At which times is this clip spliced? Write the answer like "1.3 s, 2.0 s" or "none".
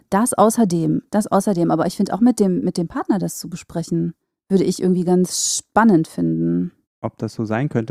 4.2 s, 6.8 s